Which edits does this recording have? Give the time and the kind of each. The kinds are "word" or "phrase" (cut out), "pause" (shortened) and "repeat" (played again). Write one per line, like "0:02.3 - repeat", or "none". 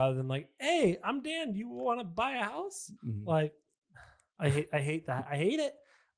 none